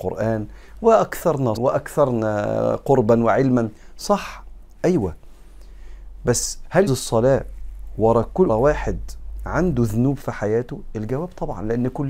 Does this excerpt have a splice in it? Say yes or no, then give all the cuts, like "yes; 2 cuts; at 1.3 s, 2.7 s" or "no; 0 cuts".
yes; 3 cuts; at 1.6 s, 6.9 s, 8.5 s